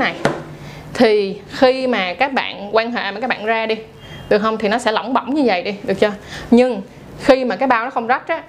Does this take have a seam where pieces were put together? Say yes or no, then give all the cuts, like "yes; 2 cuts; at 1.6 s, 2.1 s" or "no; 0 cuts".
no; 0 cuts